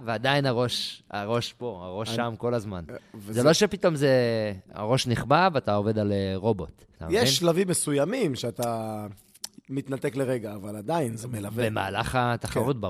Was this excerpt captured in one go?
no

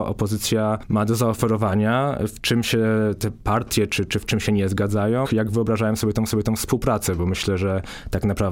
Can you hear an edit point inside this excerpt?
yes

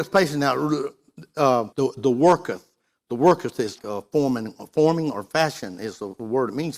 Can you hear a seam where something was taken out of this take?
yes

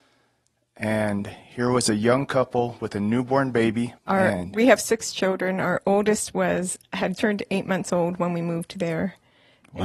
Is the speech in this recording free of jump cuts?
no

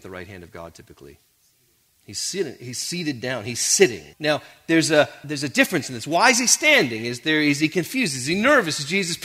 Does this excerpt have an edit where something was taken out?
yes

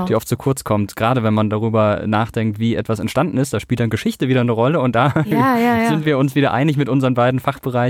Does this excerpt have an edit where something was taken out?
no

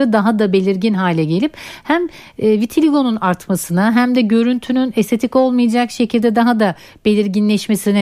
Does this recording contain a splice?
no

